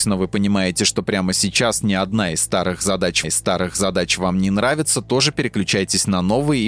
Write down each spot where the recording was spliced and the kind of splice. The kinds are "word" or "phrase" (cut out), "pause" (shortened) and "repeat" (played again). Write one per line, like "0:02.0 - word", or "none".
0:03.2 - repeat